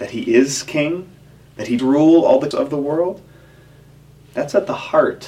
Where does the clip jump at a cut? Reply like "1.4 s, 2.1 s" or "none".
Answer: 1.8 s, 2.5 s

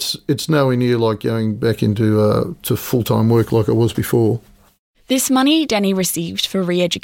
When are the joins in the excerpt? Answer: none

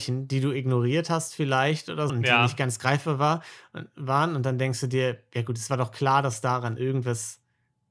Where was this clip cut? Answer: 2.1 s

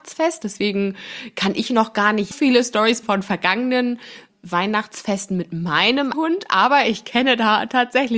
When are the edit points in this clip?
2.3 s, 3.0 s, 4.3 s, 6.1 s

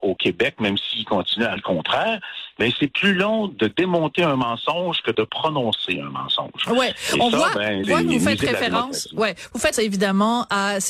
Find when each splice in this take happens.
1.6 s, 7.8 s, 9.7 s

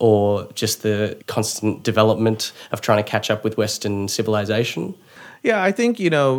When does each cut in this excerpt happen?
1.2 s

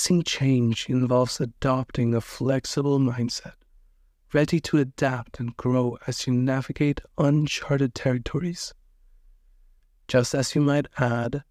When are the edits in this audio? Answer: none

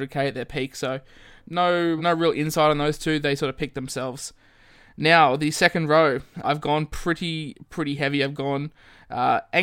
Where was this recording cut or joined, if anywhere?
2.0 s, 6.4 s

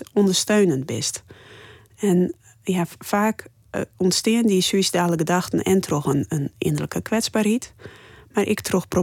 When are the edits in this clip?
none

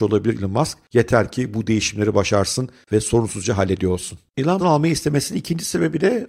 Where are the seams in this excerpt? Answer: 4.6 s

